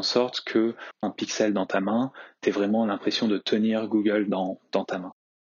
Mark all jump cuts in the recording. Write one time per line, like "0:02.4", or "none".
0:01.0